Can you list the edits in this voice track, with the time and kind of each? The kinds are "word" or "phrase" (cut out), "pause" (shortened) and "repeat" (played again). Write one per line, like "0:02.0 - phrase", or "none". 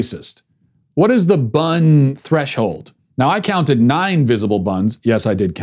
0:03.0 - pause